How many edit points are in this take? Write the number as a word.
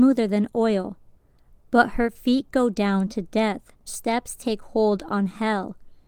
one